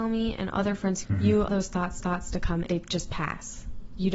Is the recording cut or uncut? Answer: cut